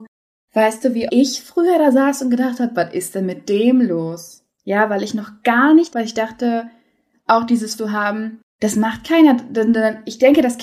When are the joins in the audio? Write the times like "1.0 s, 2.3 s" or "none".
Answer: 1.1 s, 5.9 s, 7.1 s, 7.8 s, 8.5 s